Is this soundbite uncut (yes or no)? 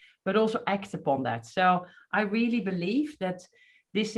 yes